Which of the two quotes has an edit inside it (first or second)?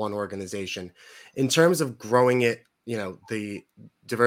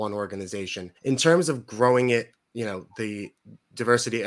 second